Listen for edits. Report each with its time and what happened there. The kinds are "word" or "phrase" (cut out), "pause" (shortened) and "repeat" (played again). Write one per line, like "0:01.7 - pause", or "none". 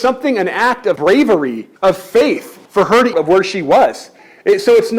0:01.0 - word
0:01.8 - pause
0:02.7 - pause
0:03.1 - phrase